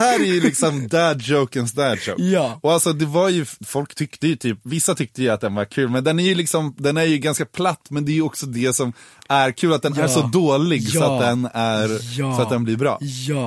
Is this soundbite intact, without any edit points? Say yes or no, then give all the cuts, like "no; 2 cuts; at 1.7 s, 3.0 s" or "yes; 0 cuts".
yes; 0 cuts